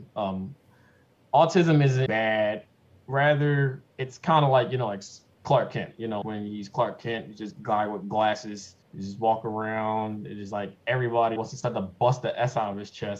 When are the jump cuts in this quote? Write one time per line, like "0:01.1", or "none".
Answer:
0:02.1
0:03.9
0:05.3
0:06.2
0:08.8
0:11.4

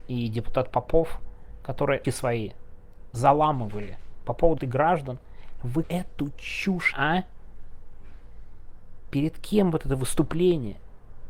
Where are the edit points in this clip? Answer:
0:02.0
0:04.6
0:05.8
0:06.9

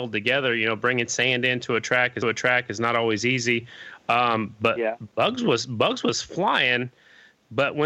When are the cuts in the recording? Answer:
0:02.2

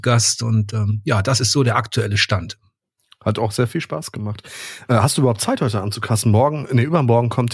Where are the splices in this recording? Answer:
0:02.8

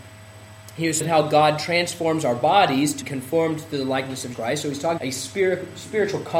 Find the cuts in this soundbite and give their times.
0:01.0
0:03.0
0:04.3
0:05.0

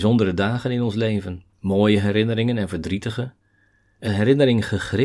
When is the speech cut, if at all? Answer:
0:01.5
0:04.0

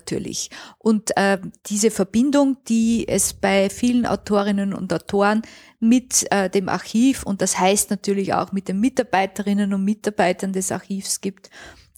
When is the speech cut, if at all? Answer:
none

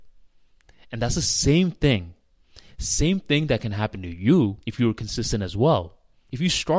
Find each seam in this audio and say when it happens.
0:04.6

